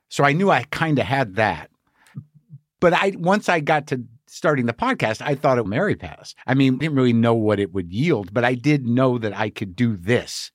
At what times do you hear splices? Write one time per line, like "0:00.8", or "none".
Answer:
0:05.7
0:06.4
0:06.8